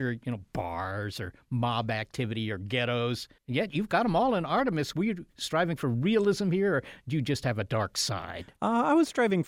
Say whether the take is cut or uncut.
cut